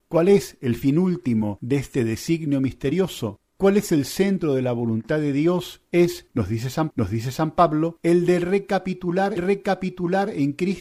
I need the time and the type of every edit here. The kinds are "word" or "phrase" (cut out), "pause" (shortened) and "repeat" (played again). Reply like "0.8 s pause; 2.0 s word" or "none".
6.9 s repeat; 9.4 s repeat

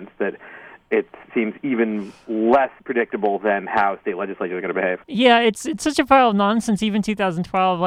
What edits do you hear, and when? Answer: 1.2 s pause; 2.8 s pause; 5.0 s pause

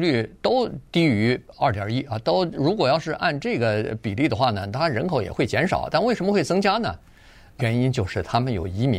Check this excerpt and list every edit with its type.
7.6 s word

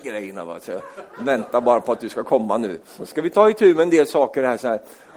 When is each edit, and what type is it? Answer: 2.8 s pause

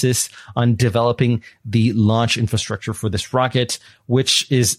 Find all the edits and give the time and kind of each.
none

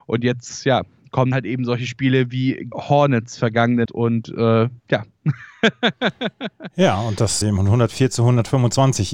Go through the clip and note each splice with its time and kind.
1.3 s word; 2.7 s phrase; 3.9 s word; 4.8 s pause; 7.4 s phrase

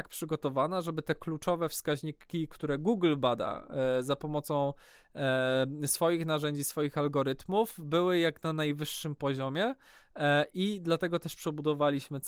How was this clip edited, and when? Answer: none

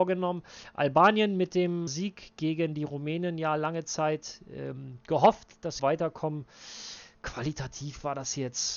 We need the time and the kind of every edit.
1.9 s word; 5.8 s phrase

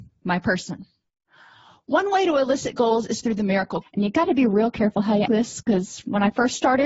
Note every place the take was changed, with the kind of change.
3.8 s word; 5.2 s word

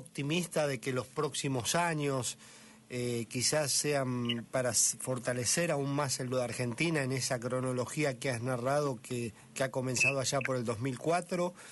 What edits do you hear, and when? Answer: 6.3 s word

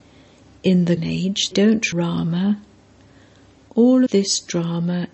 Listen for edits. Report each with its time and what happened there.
1.0 s word; 1.5 s word; 1.9 s word; 4.1 s word

